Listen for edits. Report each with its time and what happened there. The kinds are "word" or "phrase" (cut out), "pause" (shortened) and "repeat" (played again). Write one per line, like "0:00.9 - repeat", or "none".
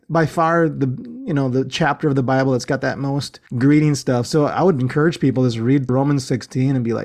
0:03.5 - pause
0:05.9 - phrase